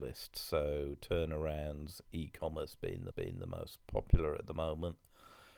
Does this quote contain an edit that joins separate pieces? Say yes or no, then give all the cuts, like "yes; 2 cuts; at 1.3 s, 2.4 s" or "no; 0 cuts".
yes; 1 cut; at 3.1 s